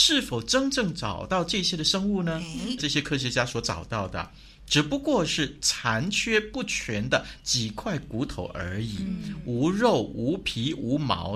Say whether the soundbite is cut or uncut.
cut